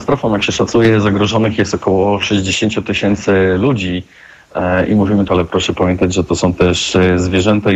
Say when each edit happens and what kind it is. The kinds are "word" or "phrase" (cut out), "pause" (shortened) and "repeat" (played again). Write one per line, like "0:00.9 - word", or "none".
0:05.3 - phrase

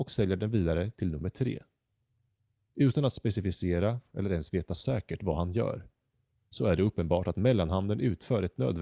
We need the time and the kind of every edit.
none

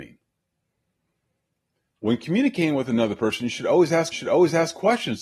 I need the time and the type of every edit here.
0:04.1 - repeat

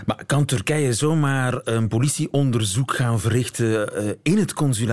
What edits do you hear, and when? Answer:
none

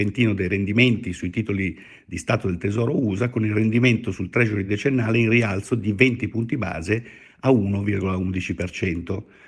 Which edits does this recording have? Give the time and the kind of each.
none

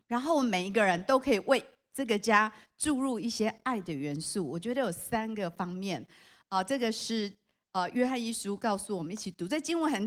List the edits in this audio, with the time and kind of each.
none

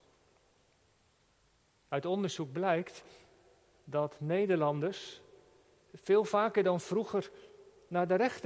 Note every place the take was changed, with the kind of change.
none

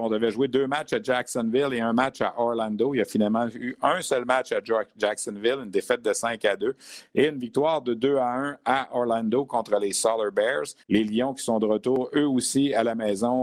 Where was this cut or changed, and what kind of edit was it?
0:10.8 - pause

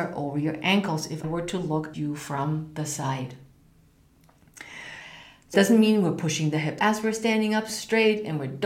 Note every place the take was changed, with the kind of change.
0:01.2 - word
0:01.9 - word
0:05.5 - word
0:06.8 - word

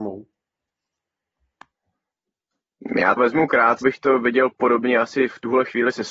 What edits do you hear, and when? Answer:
0:03.2 - word
0:03.8 - word

